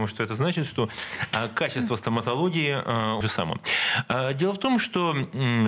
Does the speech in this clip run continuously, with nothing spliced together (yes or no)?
no